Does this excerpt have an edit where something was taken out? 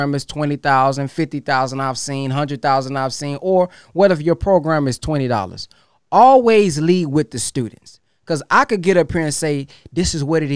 no; 0 cuts

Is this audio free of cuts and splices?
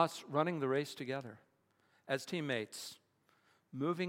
yes; 0 cuts

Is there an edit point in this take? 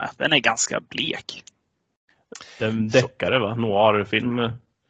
no; 0 cuts

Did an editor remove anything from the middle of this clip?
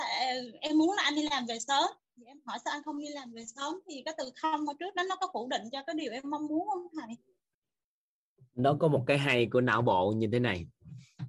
yes; 1 cut; at 7.5 s

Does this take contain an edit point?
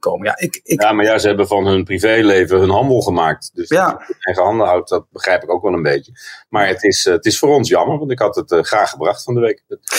no; 0 cuts

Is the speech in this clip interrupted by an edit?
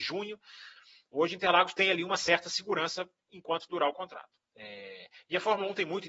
yes; 1 cut; at 4.5 s

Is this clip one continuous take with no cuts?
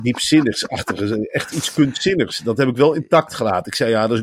yes; 0 cuts

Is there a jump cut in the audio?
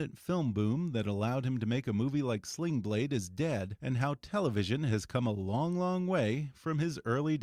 no; 0 cuts

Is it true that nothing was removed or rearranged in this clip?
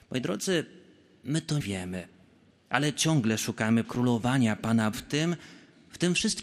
no; 4 cuts; at 1.6 s, 2.5 s, 3.8 s, 4.9 s

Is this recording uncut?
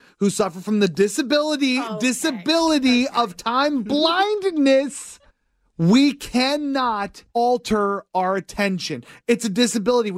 no; 2 cuts; at 5.3 s, 7.3 s

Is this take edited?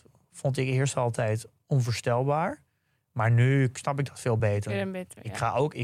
no; 0 cuts

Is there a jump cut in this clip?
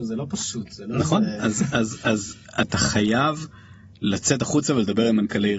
no; 0 cuts

